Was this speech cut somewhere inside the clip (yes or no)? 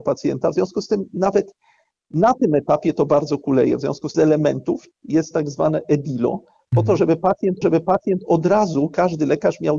yes